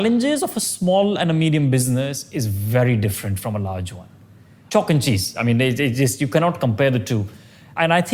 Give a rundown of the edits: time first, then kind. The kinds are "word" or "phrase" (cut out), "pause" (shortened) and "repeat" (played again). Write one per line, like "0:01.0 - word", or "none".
none